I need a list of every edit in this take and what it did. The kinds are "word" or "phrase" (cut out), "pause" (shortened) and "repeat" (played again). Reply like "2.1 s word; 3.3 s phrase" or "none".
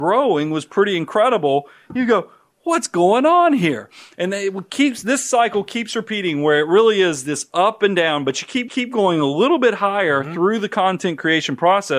8.7 s repeat